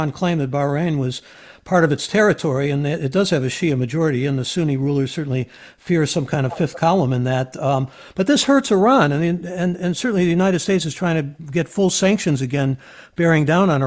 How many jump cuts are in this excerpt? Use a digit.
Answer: 0